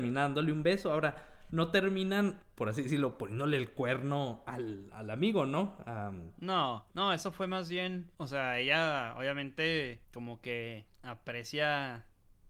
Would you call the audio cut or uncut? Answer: cut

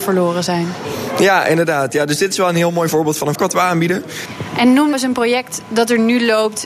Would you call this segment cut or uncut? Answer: cut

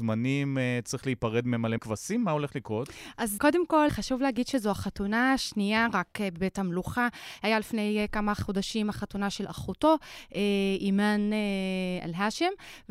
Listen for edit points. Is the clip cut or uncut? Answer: cut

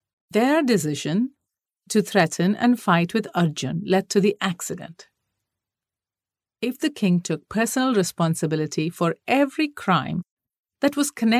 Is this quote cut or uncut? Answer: uncut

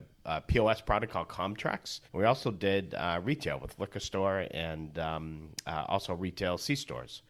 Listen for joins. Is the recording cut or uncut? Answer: cut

